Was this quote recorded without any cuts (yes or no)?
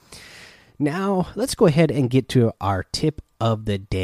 yes